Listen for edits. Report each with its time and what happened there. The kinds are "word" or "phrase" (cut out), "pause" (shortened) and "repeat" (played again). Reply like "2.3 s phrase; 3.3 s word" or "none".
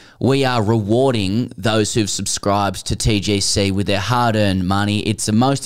none